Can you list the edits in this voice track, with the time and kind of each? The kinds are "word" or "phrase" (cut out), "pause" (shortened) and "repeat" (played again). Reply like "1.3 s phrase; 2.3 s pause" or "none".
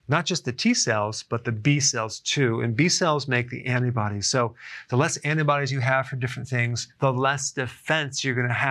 none